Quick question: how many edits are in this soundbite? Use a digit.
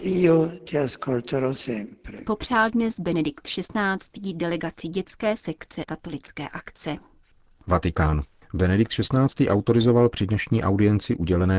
1